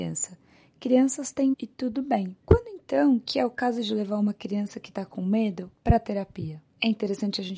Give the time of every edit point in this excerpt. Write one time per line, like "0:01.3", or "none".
0:01.5
0:02.4
0:05.7